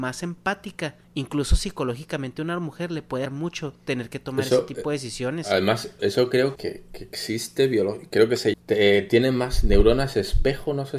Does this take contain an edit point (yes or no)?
yes